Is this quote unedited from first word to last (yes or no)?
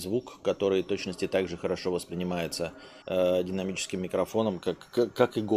no